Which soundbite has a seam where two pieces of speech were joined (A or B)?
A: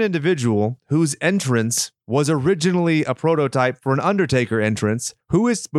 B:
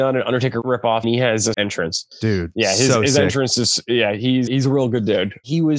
B